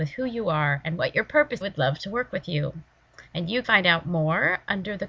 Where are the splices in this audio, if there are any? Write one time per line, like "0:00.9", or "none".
0:01.6
0:03.3
0:03.6